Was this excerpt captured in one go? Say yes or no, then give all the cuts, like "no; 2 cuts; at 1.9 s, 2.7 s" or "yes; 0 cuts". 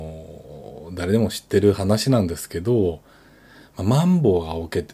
yes; 0 cuts